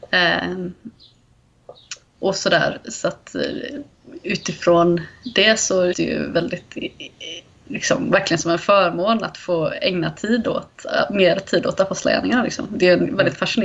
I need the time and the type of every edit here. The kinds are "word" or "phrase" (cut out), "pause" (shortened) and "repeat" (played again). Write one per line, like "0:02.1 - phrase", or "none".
0:05.9 - word